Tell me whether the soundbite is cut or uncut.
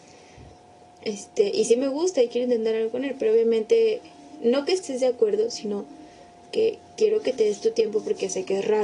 uncut